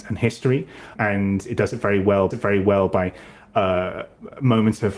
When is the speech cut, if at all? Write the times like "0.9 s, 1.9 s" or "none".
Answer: 1.0 s, 2.3 s